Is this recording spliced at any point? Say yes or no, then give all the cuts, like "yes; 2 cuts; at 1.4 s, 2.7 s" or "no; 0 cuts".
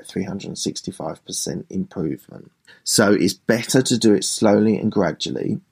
yes; 1 cut; at 2.7 s